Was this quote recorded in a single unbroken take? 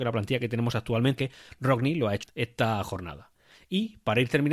no; 2 cuts; at 1.2 s, 2.2 s

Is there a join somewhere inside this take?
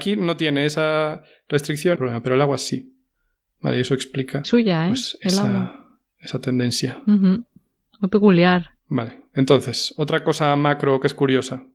yes; 3 cuts; at 2.0 s, 4.4 s, 8.8 s

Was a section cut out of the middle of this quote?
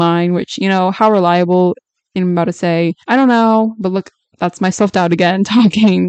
yes; 2 cuts; at 2.1 s, 3.0 s

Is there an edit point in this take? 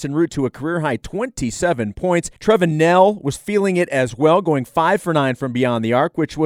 yes; 1 cut; at 2.4 s

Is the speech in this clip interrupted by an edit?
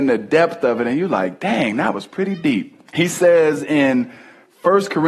yes; 1 cut; at 2.9 s

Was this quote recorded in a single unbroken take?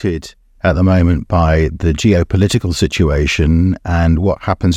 yes; 0 cuts

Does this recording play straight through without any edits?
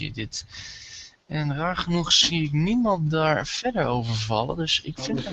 yes; 0 cuts

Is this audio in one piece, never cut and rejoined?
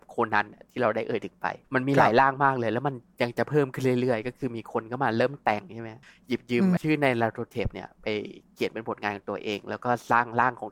no; 3 cuts; at 1.6 s, 6.0 s, 6.8 s

